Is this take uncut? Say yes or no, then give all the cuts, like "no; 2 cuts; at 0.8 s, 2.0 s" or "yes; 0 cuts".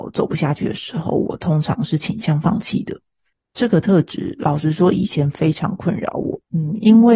yes; 0 cuts